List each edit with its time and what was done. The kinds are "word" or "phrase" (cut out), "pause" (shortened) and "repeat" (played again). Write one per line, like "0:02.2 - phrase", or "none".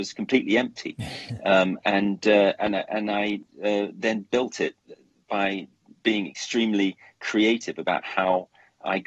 none